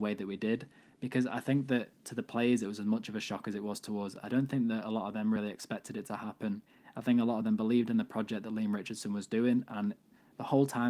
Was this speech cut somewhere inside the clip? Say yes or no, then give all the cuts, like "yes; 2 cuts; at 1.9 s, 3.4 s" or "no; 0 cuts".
no; 0 cuts